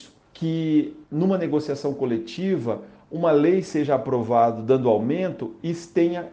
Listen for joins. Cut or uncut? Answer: uncut